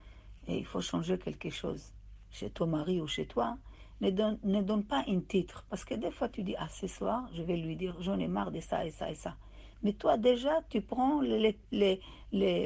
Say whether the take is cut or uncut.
uncut